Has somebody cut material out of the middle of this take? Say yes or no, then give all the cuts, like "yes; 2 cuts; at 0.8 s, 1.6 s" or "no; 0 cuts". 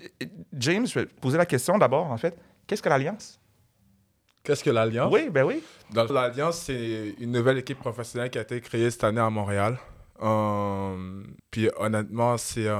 yes; 2 cuts; at 6.1 s, 11.4 s